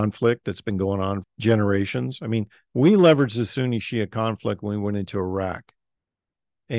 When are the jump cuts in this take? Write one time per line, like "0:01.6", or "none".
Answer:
0:01.2